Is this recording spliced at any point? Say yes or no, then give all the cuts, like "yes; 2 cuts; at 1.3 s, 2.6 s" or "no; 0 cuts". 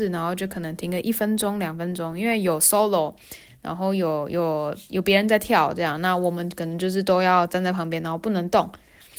no; 0 cuts